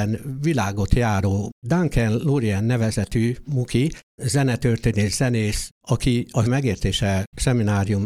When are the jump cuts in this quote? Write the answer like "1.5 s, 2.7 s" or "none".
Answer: 4.0 s, 6.5 s